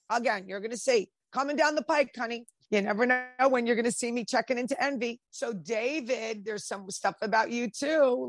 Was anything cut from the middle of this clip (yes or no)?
yes